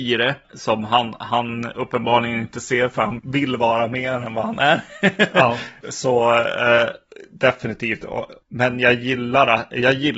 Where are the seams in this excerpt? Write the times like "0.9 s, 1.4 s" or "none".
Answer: 3.2 s